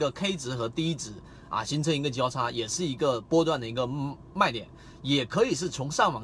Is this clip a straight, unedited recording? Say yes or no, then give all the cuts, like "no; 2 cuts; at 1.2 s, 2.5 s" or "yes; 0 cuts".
yes; 0 cuts